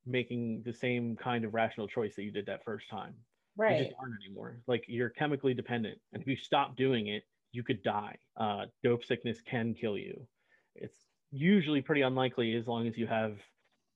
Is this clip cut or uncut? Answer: cut